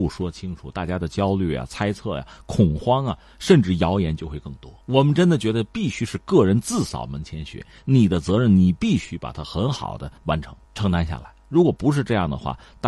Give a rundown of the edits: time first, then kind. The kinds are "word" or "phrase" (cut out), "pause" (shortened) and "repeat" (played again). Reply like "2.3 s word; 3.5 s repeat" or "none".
4.8 s pause; 10.2 s pause; 10.6 s pause